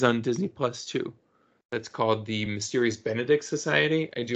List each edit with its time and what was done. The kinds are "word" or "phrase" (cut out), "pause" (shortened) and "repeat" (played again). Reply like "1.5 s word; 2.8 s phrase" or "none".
none